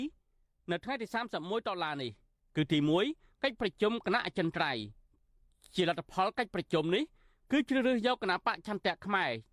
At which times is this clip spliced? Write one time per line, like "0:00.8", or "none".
none